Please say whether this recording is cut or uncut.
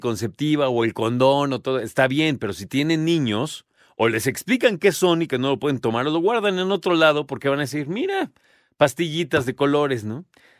uncut